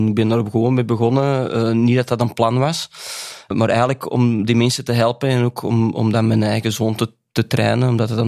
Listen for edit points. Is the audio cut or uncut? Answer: uncut